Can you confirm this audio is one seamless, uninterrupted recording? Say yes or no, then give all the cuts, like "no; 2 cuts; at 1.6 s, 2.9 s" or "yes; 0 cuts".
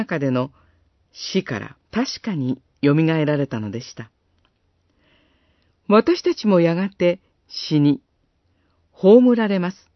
no; 1 cut; at 1.8 s